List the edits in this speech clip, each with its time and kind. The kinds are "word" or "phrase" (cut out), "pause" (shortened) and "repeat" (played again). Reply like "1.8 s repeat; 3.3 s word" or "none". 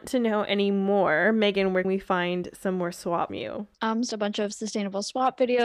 1.8 s word; 3.3 s word; 3.7 s pause; 4.1 s phrase